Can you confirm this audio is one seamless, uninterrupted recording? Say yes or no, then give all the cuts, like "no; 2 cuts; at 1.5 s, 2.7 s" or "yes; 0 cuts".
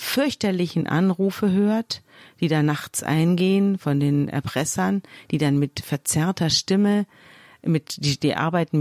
yes; 0 cuts